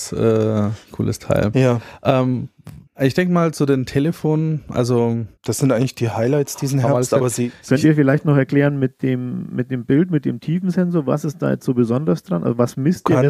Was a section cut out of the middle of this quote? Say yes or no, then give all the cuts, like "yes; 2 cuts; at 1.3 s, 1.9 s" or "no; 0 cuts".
yes; 2 cuts; at 2.9 s, 5.4 s